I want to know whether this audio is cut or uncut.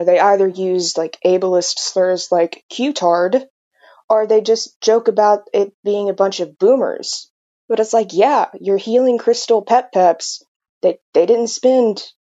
uncut